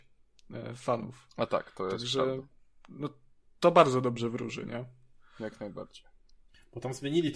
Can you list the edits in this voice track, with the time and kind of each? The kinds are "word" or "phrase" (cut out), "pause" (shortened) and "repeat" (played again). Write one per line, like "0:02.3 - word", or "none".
none

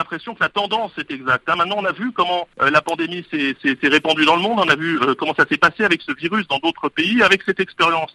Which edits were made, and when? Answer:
0:02.5 - pause

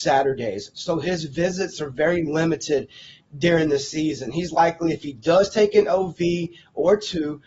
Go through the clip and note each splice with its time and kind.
none

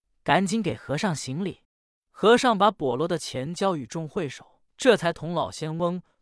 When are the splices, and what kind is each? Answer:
0:01.6 - pause
0:04.7 - pause

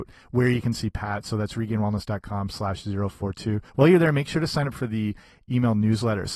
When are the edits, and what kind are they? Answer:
0:03.7 - pause

